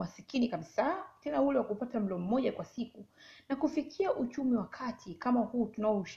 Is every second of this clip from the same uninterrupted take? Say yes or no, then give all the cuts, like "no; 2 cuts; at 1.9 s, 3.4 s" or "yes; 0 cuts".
yes; 0 cuts